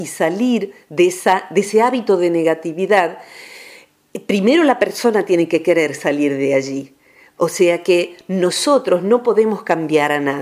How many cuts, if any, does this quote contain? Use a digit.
0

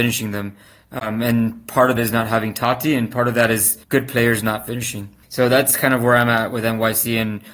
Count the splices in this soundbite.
3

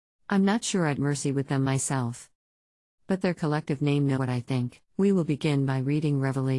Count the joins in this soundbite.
4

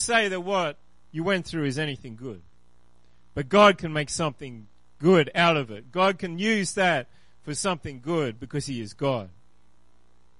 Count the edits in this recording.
0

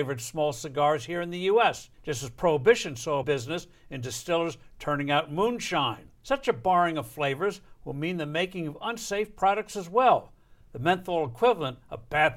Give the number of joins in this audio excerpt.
3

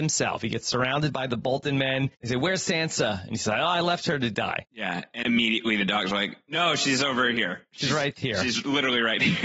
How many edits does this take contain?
3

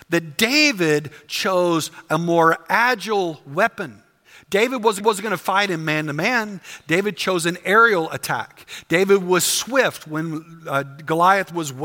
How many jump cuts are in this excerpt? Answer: 1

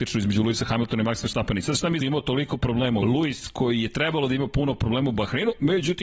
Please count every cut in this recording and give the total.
2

